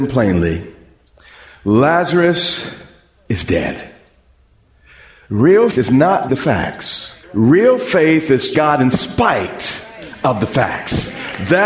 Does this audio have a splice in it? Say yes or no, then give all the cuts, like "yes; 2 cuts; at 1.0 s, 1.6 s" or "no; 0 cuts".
yes; 4 cuts; at 5.7 s, 6.3 s, 7.2 s, 8.5 s